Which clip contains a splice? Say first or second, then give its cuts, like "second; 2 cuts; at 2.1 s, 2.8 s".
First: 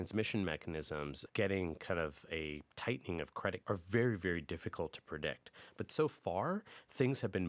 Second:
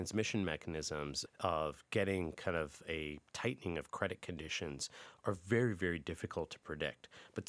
first; 2 cuts; at 1.3 s, 3.6 s